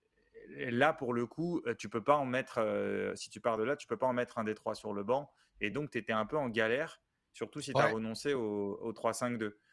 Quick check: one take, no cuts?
yes; 0 cuts

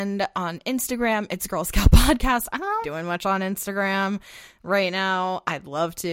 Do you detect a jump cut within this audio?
yes; 1 cut; at 2.8 s

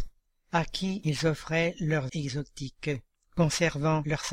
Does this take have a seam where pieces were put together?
yes; 1 cut; at 2.1 s

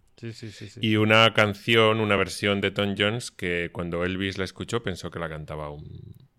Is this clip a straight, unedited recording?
yes; 0 cuts

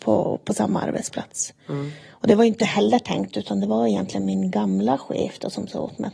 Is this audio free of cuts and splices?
yes; 0 cuts

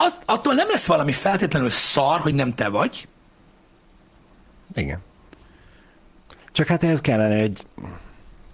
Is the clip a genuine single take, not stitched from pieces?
yes; 0 cuts

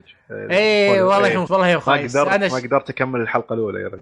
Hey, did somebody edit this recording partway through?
yes; 1 cut; at 1.5 s

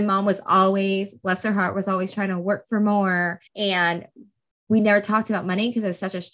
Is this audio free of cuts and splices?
no; 1 cut; at 3.5 s

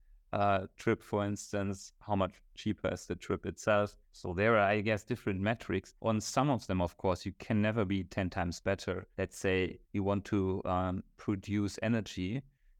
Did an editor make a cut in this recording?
yes; 4 cuts; at 4.0 s, 6.0 s, 9.1 s, 9.8 s

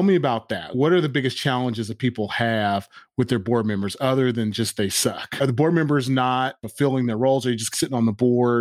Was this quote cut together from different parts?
no; 0 cuts

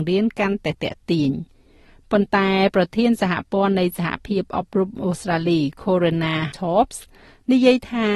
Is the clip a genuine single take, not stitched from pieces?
no; 1 cut; at 6.5 s

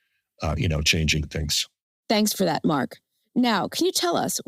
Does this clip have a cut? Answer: no; 0 cuts

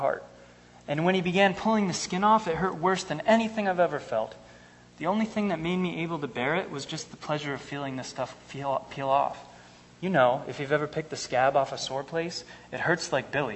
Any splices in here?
no; 0 cuts

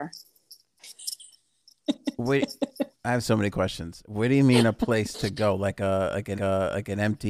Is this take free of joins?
no; 2 cuts; at 2.9 s, 6.4 s

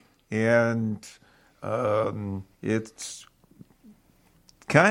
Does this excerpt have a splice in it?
yes; 1 cut; at 2.5 s

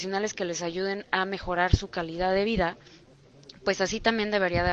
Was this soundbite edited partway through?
no; 0 cuts

